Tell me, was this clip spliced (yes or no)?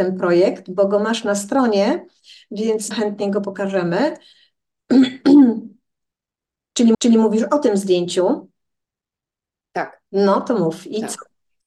yes